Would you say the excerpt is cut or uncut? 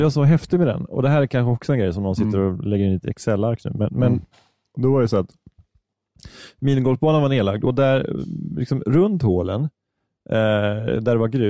uncut